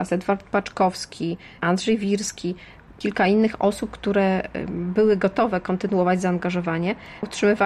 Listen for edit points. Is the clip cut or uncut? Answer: uncut